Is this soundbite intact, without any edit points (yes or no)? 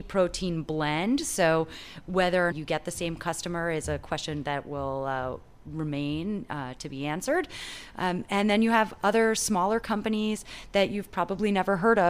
no